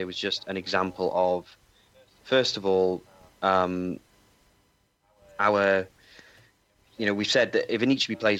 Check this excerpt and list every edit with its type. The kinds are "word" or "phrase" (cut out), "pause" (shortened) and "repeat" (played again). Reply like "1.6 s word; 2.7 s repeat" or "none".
none